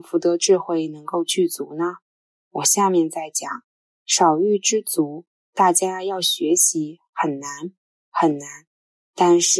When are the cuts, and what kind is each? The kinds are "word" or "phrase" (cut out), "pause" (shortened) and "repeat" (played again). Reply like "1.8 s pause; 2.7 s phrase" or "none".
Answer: none